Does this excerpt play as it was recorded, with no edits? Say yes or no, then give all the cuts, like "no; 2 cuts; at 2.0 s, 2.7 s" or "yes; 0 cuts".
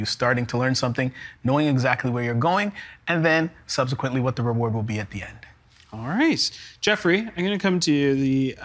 yes; 0 cuts